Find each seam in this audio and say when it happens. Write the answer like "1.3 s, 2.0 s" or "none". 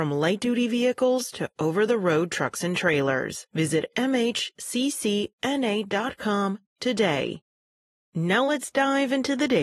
none